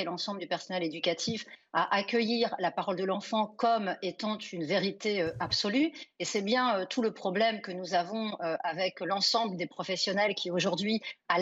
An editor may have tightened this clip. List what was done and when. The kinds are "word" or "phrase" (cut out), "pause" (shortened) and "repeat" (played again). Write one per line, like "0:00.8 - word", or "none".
none